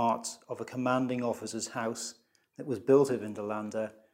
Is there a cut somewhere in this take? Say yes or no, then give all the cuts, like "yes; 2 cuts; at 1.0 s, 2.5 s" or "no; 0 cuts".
no; 0 cuts